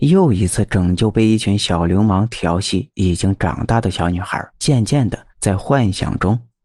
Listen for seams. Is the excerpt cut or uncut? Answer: cut